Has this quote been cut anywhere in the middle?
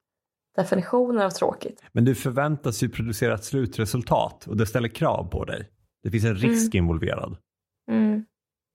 no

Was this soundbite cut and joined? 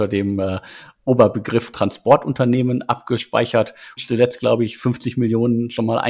yes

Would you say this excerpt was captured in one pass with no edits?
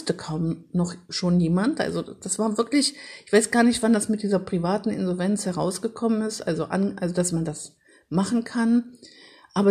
yes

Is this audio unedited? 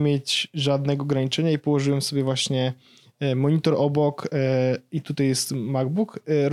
yes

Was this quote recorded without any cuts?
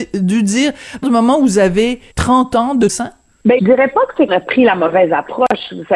no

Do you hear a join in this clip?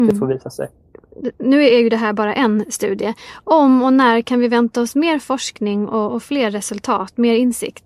no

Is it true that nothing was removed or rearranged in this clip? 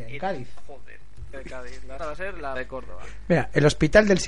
no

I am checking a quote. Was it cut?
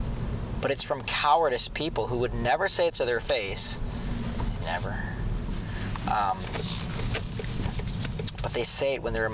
yes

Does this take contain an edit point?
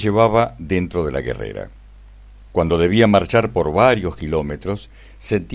no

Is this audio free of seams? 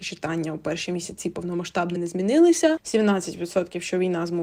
no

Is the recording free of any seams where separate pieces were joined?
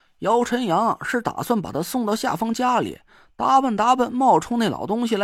yes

